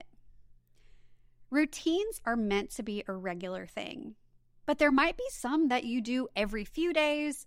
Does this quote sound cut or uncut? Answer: uncut